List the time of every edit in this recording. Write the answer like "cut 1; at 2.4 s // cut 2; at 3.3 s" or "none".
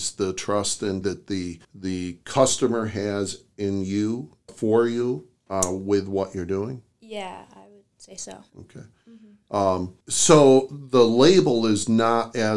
cut 1; at 1.0 s // cut 2; at 1.6 s // cut 3; at 4.5 s // cut 4; at 6.9 s // cut 5; at 7.9 s // cut 6; at 8.5 s // cut 7; at 10.0 s